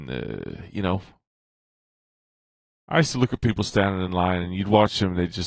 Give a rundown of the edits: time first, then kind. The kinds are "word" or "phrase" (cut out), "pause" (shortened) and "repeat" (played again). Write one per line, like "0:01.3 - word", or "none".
none